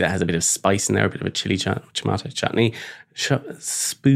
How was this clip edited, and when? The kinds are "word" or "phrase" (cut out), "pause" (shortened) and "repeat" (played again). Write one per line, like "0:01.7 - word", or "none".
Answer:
none